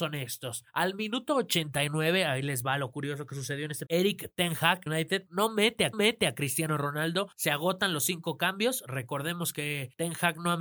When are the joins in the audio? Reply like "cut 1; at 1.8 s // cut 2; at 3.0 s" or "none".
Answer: cut 1; at 3.9 s // cut 2; at 4.9 s // cut 3; at 5.9 s